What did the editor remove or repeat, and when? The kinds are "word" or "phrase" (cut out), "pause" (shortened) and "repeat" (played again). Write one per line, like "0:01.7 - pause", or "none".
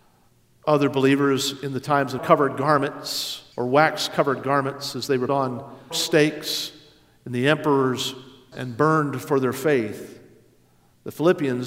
0:02.2 - phrase
0:03.5 - pause
0:05.3 - word
0:05.9 - word
0:08.5 - word